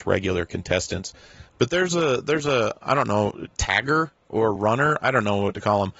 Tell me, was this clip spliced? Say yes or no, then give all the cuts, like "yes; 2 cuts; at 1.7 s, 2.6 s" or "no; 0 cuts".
no; 0 cuts